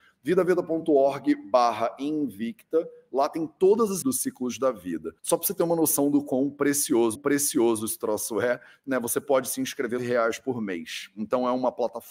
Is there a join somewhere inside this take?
yes; 4 cuts; at 4.0 s, 5.2 s, 7.1 s, 10.0 s

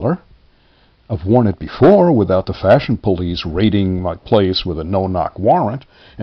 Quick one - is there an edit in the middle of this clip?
no; 0 cuts

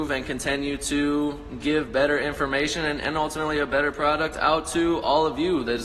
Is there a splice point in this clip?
no; 0 cuts

